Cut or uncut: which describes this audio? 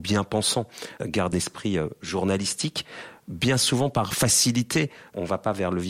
cut